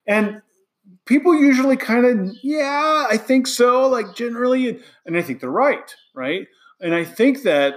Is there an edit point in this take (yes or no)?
no